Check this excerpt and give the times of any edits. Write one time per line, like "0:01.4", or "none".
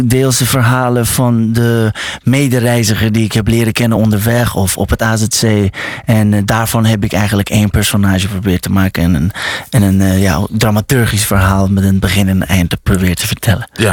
none